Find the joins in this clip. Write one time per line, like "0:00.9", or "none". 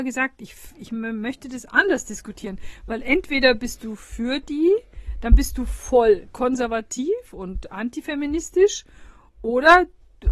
none